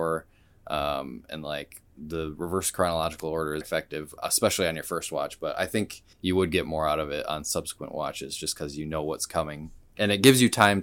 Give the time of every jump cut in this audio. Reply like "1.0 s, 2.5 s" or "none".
1.9 s, 3.6 s, 6.1 s